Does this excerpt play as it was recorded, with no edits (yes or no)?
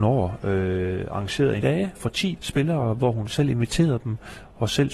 no